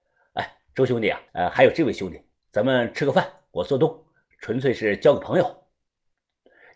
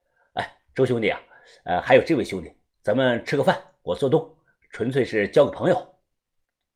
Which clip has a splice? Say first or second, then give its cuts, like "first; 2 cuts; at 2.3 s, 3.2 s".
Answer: first; 1 cut; at 1.3 s